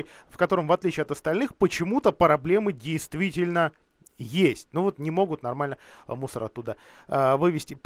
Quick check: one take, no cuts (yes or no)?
yes